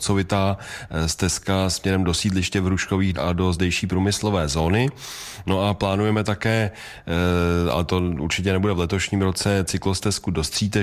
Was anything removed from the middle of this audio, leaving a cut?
yes; 1 cut; at 3.1 s

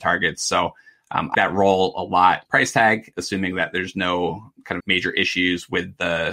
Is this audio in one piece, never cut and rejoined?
no; 3 cuts; at 1.3 s, 2.5 s, 4.8 s

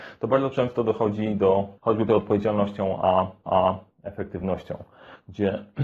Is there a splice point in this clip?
yes; 3 cuts; at 1.8 s, 2.1 s, 3.5 s

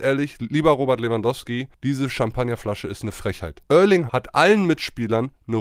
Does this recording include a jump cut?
yes; 1 cut; at 4.1 s

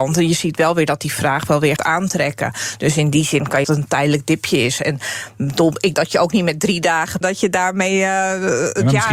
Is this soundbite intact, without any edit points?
no; 4 cuts; at 1.8 s, 3.6 s, 5.9 s, 7.2 s

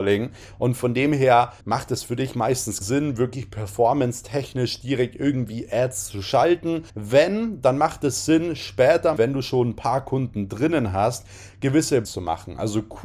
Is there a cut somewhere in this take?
yes; 5 cuts; at 1.6 s, 2.8 s, 6.9 s, 9.2 s, 12.0 s

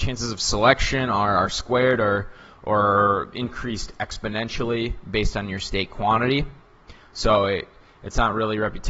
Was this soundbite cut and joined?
no; 0 cuts

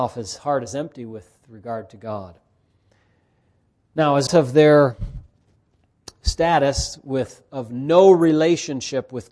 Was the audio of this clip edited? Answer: yes; 1 cut; at 4.3 s

